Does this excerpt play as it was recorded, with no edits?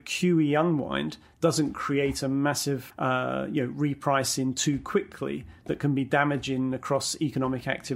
no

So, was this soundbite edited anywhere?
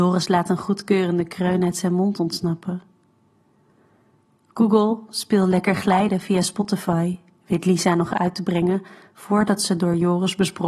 no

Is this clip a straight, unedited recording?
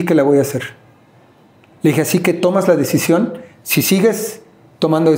yes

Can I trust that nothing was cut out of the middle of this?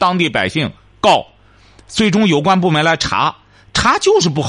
yes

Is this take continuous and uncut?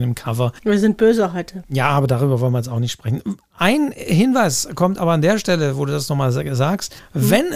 yes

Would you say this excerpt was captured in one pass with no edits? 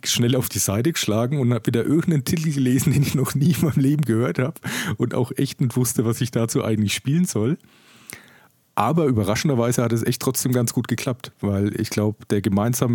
yes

